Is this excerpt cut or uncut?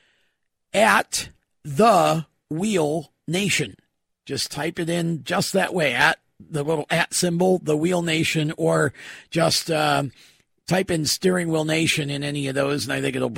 uncut